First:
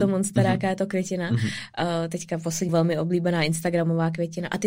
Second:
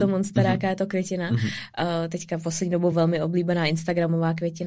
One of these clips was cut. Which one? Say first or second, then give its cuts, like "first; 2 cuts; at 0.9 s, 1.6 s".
first; 1 cut; at 2.7 s